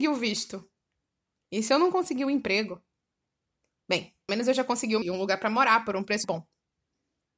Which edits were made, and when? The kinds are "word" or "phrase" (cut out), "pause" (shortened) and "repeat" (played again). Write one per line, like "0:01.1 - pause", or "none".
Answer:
0:04.3 - word
0:05.0 - word
0:06.2 - word